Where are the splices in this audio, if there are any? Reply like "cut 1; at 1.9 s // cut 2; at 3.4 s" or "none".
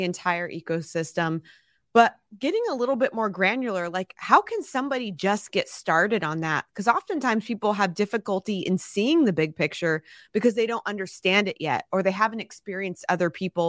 none

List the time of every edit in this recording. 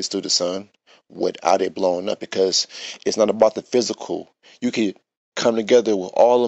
none

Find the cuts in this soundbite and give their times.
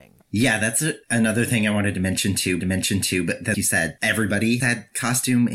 cut 1; at 1.0 s // cut 2; at 2.6 s // cut 3; at 3.5 s // cut 4; at 4.6 s

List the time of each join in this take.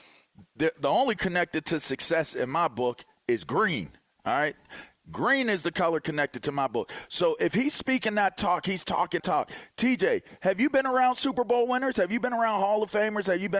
cut 1; at 1.2 s // cut 2; at 9.2 s

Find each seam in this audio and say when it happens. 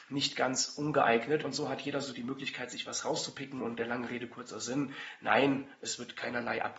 none

